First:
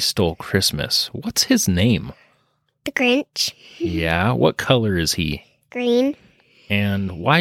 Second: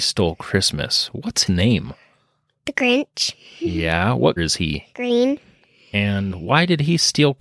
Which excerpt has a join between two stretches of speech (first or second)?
second